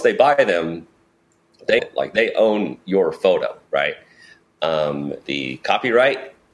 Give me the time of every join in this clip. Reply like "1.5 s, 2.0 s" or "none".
1.8 s, 3.6 s, 5.2 s